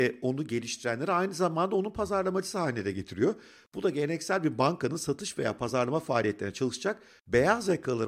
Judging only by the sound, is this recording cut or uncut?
uncut